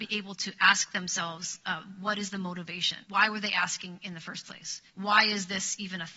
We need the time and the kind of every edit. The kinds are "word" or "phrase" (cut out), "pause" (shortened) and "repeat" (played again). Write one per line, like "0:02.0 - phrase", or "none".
0:03.0 - pause
0:04.9 - pause